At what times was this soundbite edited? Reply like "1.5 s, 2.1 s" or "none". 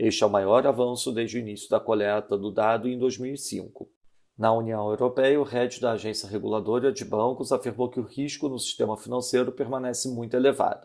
none